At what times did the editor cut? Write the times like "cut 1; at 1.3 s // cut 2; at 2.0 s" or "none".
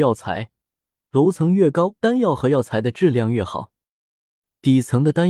none